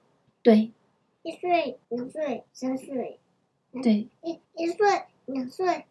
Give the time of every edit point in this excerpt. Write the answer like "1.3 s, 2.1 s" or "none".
1.8 s, 2.5 s, 4.4 s